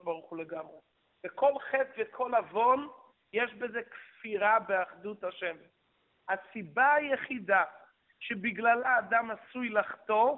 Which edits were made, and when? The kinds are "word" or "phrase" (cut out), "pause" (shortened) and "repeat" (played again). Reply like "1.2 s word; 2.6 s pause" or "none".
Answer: none